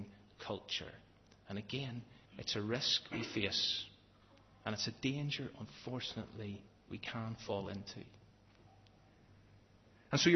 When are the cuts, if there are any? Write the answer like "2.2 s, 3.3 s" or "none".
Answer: 2.3 s, 6.7 s

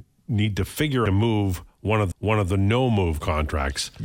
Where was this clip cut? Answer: 1.1 s, 2.1 s

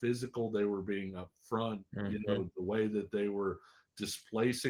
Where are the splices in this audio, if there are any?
none

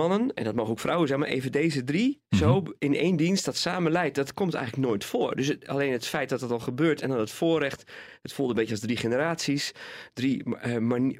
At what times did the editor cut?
none

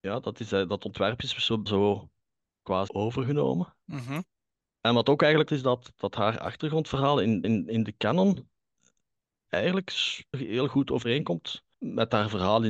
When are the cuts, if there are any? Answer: 1.7 s, 2.9 s, 3.8 s, 5.5 s, 7.4 s, 10.3 s, 11.7 s

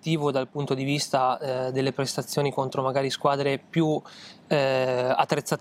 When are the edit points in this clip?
none

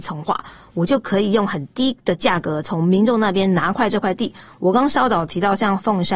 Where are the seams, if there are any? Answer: none

